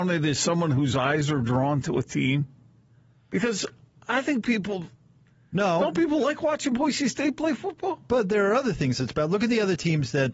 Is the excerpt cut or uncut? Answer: uncut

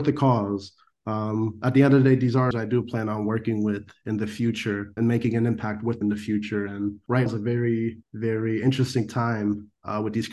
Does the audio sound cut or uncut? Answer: cut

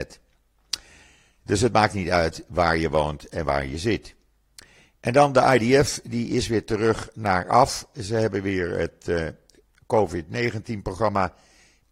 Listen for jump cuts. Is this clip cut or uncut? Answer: uncut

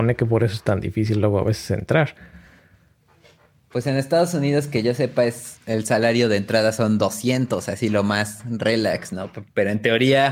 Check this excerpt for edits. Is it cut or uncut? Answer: uncut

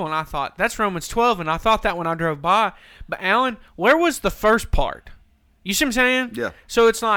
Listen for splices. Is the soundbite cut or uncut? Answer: uncut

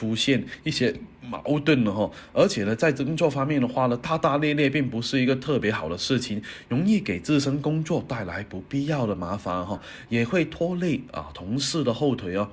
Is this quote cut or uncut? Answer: uncut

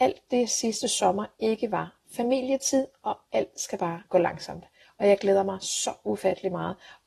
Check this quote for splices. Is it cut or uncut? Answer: uncut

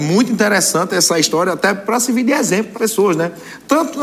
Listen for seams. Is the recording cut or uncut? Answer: cut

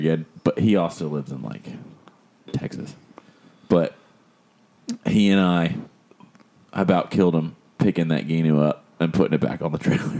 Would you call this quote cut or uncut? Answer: uncut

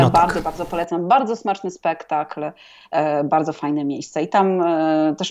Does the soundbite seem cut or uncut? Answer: uncut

